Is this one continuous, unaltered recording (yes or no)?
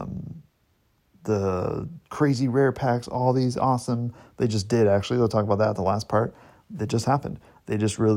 yes